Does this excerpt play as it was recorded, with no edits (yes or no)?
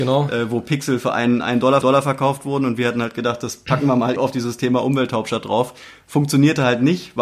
no